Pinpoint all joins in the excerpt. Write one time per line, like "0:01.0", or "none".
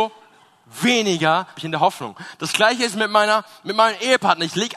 0:01.6